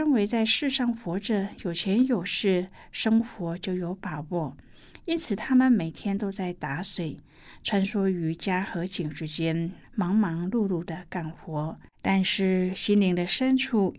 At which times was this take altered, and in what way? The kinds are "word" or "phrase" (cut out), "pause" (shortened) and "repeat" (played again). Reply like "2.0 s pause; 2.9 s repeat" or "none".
9.8 s phrase; 11.9 s pause